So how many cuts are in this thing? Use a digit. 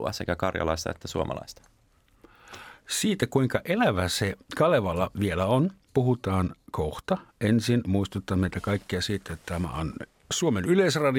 2